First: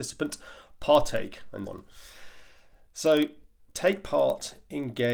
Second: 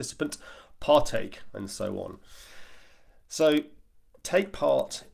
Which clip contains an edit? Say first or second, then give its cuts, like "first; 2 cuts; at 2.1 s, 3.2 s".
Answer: first; 2 cuts; at 1.7 s, 3.7 s